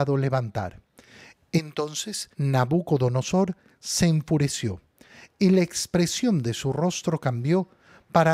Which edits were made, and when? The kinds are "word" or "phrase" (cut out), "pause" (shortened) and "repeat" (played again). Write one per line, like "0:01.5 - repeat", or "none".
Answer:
0:02.3 - pause